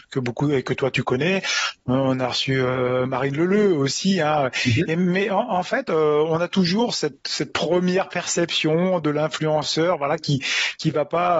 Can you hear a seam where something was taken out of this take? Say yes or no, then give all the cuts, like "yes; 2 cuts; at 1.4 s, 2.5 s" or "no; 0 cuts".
no; 0 cuts